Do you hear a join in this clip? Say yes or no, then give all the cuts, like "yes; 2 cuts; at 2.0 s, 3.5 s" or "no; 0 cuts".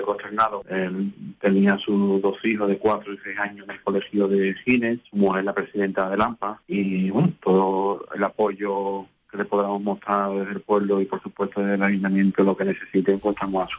no; 0 cuts